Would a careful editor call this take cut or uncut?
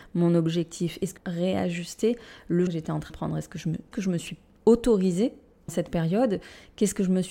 cut